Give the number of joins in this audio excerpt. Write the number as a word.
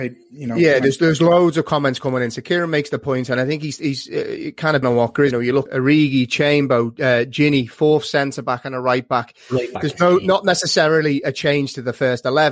three